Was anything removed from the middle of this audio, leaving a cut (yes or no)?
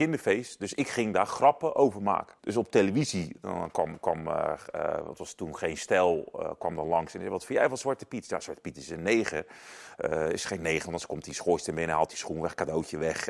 yes